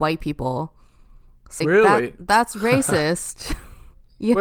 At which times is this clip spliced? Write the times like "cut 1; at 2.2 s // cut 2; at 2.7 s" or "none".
cut 1; at 1.6 s